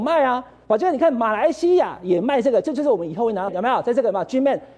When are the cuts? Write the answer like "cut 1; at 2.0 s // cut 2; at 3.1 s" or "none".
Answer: cut 1; at 3.5 s